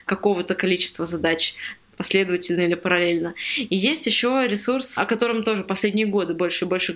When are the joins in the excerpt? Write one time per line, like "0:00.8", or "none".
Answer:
none